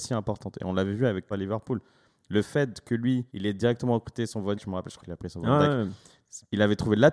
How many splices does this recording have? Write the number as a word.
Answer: four